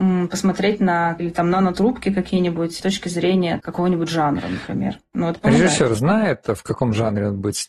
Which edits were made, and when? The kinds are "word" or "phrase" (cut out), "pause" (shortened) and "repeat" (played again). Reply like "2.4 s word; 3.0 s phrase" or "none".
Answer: 1.2 s word; 2.8 s word; 3.6 s word; 5.9 s word